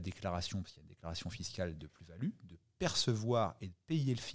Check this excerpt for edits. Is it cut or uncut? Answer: uncut